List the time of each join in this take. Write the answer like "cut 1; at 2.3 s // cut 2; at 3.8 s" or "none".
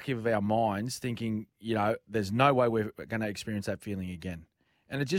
cut 1; at 1.5 s